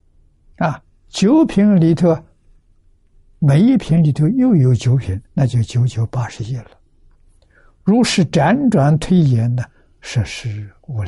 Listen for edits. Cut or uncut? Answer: cut